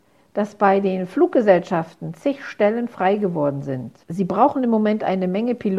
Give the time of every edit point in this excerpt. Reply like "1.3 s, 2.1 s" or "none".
4.0 s